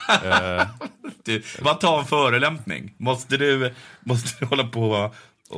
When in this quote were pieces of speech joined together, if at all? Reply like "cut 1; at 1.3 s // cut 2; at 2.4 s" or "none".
cut 1; at 1.6 s

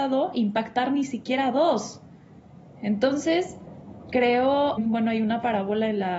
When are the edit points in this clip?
cut 1; at 4.8 s

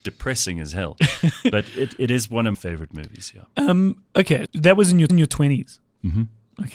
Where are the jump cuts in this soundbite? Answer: cut 1; at 2.5 s // cut 2; at 4.5 s // cut 3; at 5.1 s

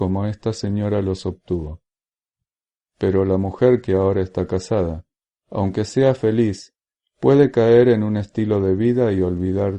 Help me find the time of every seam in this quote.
none

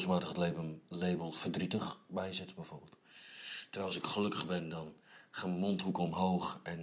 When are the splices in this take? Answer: none

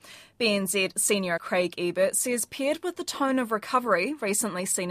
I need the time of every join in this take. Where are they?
cut 1; at 1.4 s

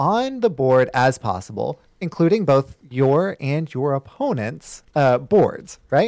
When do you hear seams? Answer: cut 1; at 4.9 s

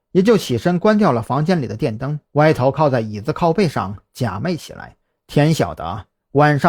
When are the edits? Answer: cut 1; at 2.3 s // cut 2; at 5.0 s

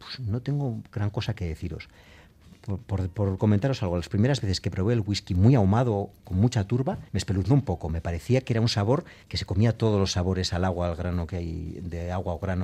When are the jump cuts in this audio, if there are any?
cut 1; at 7.1 s // cut 2; at 9.2 s

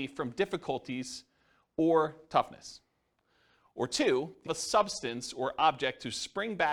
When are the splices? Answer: cut 1; at 4.5 s

